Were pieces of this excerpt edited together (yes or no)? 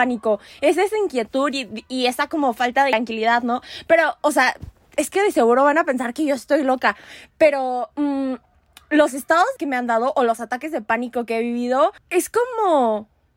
yes